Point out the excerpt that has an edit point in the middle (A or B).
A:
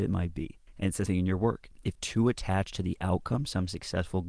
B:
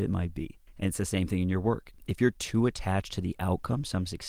A